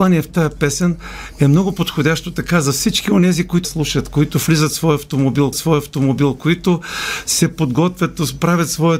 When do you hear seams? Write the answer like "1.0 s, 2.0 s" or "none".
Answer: 3.6 s, 5.5 s

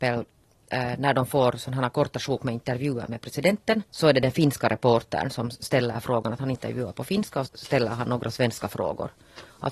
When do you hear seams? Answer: 3.9 s, 7.5 s

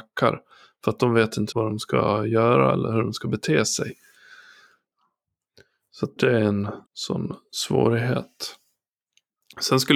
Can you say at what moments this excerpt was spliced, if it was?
1.5 s, 6.2 s, 6.9 s

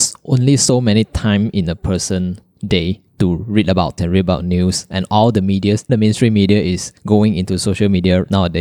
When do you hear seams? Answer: 3.1 s, 4.0 s, 5.9 s, 7.0 s

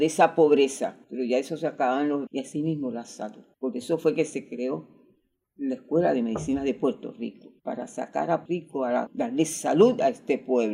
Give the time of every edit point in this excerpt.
1.0 s, 2.3 s, 3.5 s, 7.6 s, 8.5 s, 9.1 s

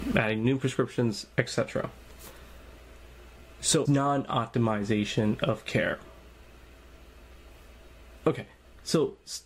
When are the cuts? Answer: 3.9 s

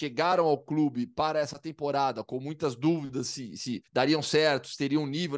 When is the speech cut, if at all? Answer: 3.9 s

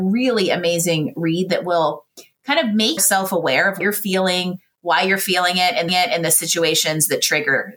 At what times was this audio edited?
3.0 s, 3.8 s, 5.9 s

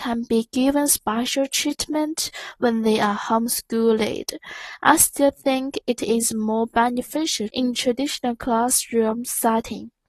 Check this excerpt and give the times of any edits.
7.5 s

